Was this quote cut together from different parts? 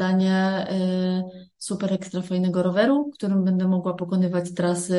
no; 0 cuts

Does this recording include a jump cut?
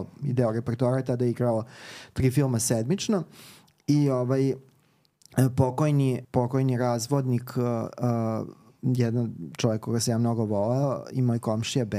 yes; 1 cut; at 6.2 s

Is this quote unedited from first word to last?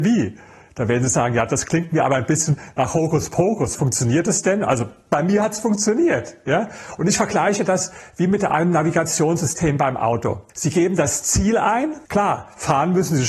no; 2 cuts; at 10.5 s, 12.0 s

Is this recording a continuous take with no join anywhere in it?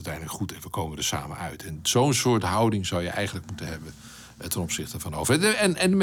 yes; 0 cuts

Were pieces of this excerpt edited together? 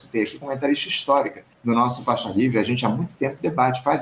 yes; 1 cut; at 1.5 s

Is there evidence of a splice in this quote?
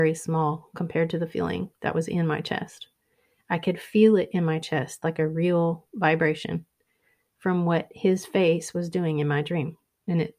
no; 0 cuts

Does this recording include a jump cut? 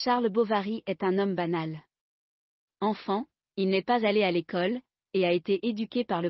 no; 0 cuts

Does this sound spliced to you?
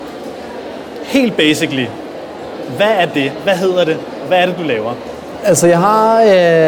no; 0 cuts

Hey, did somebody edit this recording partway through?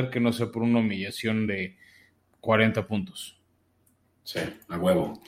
no; 0 cuts

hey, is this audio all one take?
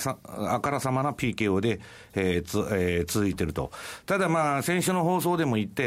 yes; 0 cuts

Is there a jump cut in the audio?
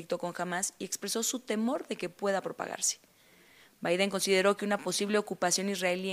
no; 0 cuts

